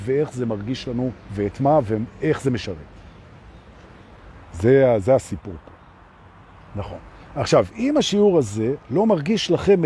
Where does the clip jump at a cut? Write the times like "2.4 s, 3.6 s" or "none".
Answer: 4.4 s